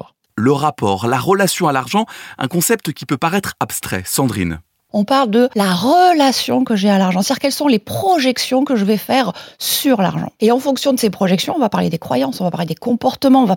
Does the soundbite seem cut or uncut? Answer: uncut